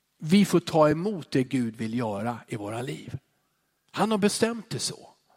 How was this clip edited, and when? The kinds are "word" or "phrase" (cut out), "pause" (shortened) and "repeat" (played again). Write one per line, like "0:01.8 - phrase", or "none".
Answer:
none